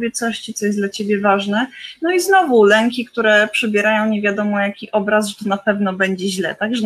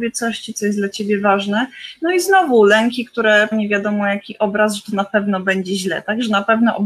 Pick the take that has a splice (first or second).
second